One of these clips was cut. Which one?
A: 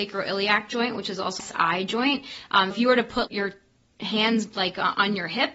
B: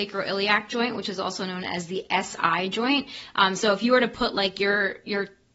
A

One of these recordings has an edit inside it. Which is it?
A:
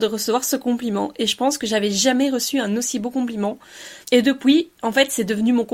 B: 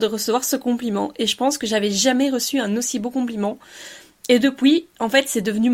A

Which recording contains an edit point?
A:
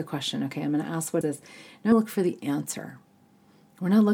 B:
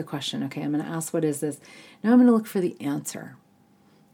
A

